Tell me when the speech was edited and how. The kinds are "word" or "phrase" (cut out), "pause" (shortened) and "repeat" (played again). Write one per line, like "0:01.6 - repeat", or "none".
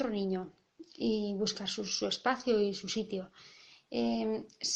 none

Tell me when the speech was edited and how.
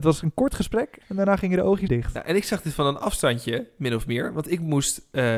0:01.0 - pause
0:01.9 - word

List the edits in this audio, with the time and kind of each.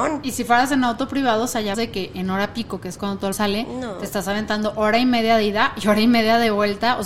0:01.7 - word
0:03.3 - word

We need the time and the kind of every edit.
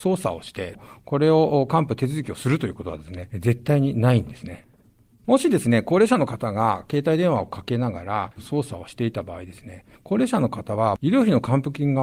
0:08.4 - word

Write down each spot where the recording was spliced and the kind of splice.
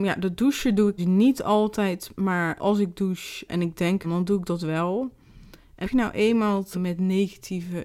0:01.0 - word
0:02.6 - word
0:03.5 - word
0:04.0 - word
0:05.8 - word
0:06.7 - word

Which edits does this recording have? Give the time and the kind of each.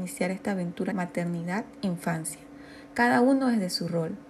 0:00.9 - word

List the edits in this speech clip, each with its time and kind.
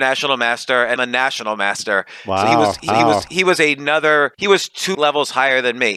0:01.0 - word
0:02.9 - repeat
0:04.3 - pause
0:04.9 - word

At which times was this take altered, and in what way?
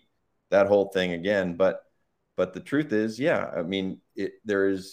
none

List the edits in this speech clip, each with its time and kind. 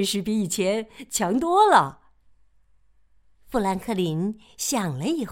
0:02.2 - pause

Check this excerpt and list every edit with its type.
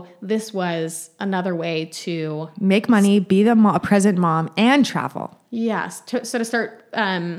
none

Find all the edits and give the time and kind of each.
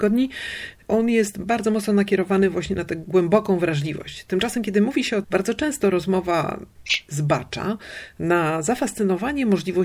0:05.2 - phrase

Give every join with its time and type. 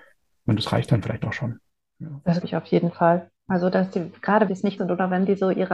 0:02.4 - word
0:04.5 - word
0:04.8 - word

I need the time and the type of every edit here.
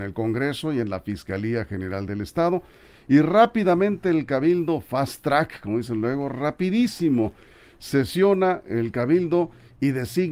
none

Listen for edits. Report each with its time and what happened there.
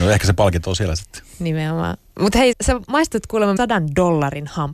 0:02.5 - word
0:03.6 - word

